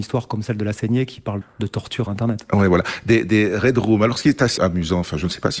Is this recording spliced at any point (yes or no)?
yes